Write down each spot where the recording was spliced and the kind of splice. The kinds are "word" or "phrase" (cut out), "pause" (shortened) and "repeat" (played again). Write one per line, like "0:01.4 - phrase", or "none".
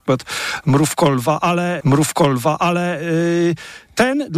0:01.8 - repeat